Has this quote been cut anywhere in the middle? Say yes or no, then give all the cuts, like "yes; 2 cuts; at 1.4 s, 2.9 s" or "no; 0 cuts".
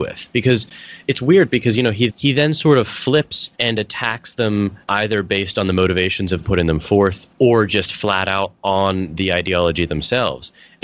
yes; 5 cuts; at 2.1 s, 3.5 s, 4.8 s, 6.4 s, 7.3 s